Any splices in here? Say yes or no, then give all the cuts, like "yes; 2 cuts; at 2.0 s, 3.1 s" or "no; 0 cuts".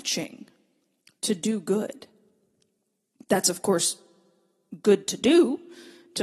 no; 0 cuts